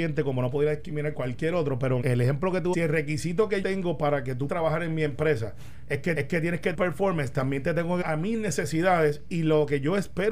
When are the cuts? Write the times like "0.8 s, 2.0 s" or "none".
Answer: 1.1 s, 2.0 s, 2.7 s, 3.6 s, 4.5 s, 6.1 s, 6.7 s, 8.0 s